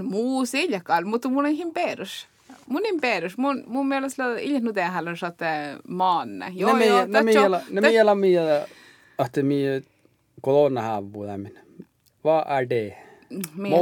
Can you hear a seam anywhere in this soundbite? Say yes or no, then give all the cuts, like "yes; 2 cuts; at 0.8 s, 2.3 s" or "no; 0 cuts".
no; 0 cuts